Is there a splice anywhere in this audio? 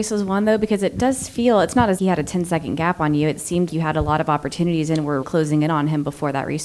yes; 3 cuts; at 2.0 s, 3.7 s, 5.2 s

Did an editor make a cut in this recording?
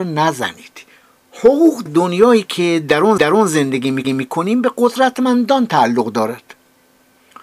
yes; 3 cuts; at 1.9 s, 3.2 s, 4.0 s

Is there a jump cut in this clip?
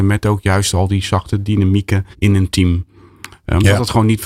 yes; 1 cut; at 2.1 s

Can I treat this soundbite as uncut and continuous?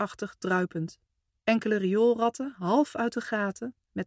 no; 1 cut; at 1.3 s

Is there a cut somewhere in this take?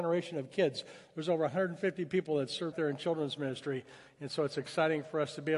yes; 1 cut; at 2.7 s

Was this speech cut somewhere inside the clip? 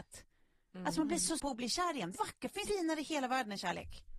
yes; 3 cuts; at 1.4 s, 2.1 s, 2.6 s

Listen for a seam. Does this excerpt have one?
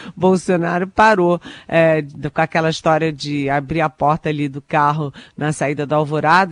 no; 0 cuts

